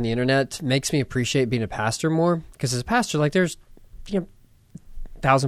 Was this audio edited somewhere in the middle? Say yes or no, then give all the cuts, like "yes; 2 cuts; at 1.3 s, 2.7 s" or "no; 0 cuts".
no; 0 cuts